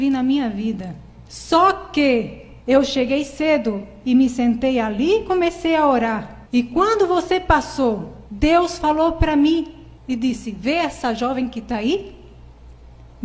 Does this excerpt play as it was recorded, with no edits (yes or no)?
no